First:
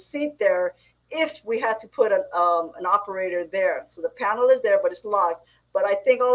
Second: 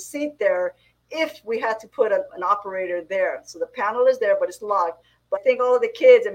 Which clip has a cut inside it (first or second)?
second